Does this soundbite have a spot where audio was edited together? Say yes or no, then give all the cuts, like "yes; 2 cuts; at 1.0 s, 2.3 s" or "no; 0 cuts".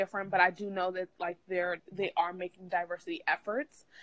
yes; 1 cut; at 1.8 s